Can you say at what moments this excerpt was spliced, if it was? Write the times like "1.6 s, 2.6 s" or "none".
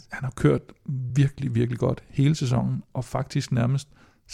none

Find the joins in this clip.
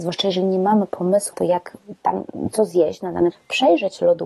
1.3 s, 3.3 s

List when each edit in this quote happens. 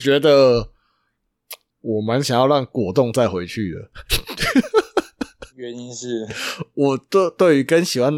1.7 s, 5.5 s

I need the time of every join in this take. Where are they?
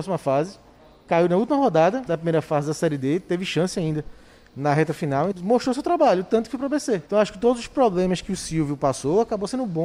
2.1 s, 5.3 s, 7.1 s

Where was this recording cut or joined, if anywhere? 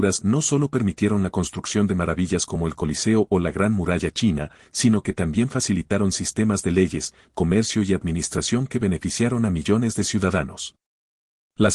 none

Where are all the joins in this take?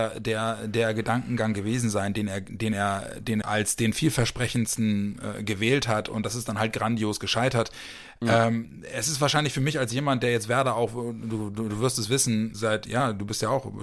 3.4 s, 12.5 s

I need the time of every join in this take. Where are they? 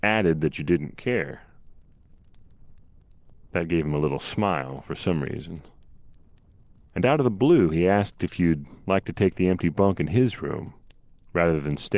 none

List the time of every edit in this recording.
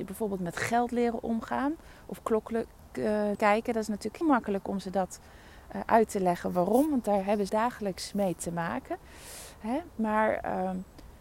3.3 s, 4.2 s, 7.5 s, 9.9 s

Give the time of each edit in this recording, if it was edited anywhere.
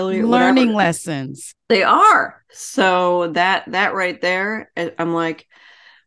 1.6 s

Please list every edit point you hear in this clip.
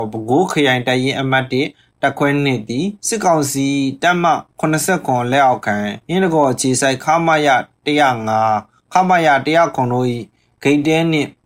3.0 s, 4.5 s, 6.0 s

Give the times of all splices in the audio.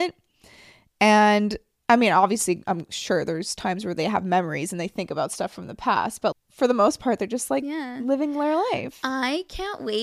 6.3 s

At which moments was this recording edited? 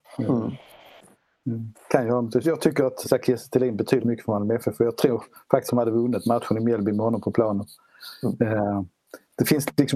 2.4 s, 3.0 s, 4.0 s, 5.7 s

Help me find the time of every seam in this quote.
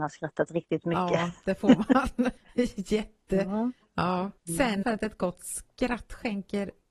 2.4 s, 4.4 s, 4.8 s

